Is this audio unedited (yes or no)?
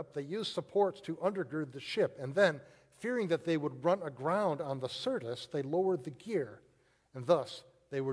yes